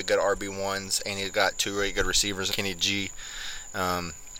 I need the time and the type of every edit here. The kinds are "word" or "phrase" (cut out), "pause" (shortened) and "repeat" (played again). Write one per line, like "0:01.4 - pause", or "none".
0:02.5 - phrase